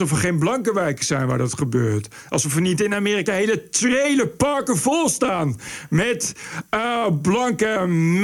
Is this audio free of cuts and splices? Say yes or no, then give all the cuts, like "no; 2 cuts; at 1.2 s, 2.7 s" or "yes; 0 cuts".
yes; 0 cuts